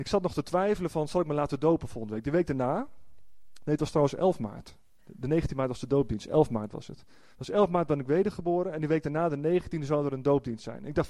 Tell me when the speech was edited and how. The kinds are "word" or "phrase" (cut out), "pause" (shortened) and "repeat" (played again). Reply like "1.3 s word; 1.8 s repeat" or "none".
none